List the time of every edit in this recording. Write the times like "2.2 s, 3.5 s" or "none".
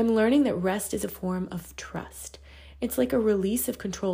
none